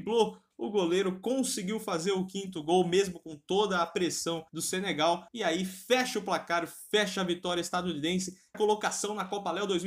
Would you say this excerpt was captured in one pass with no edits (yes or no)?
no